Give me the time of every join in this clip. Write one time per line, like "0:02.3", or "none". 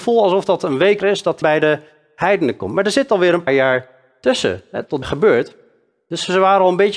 0:01.0
0:01.4
0:03.5
0:05.0